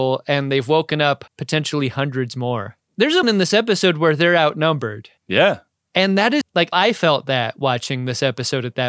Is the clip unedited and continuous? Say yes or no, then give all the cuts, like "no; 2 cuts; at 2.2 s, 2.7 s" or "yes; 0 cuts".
no; 6 cuts; at 1.3 s, 2.8 s, 3.2 s, 5.2 s, 6.4 s, 6.7 s